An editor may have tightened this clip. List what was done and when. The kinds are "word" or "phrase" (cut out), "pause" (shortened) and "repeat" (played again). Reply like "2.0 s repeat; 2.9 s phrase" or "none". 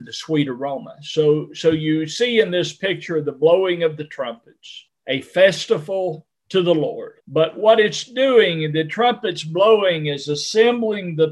4.9 s pause; 6.4 s pause; 7.2 s pause